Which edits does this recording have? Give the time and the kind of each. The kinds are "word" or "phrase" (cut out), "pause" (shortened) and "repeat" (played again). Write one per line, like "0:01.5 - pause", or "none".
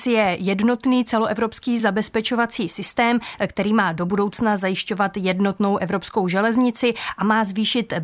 none